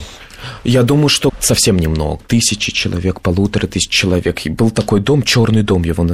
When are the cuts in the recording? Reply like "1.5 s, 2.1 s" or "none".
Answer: 2.2 s